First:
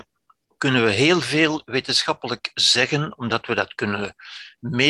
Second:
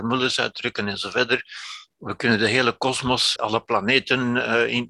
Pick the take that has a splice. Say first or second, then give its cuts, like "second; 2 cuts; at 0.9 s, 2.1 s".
second; 1 cut; at 3.4 s